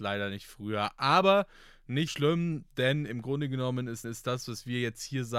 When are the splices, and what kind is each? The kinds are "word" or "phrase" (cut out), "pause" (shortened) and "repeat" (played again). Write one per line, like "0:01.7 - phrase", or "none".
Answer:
0:02.1 - word
0:04.0 - repeat